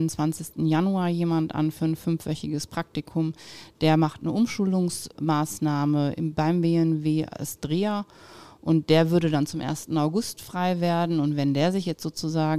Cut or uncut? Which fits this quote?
uncut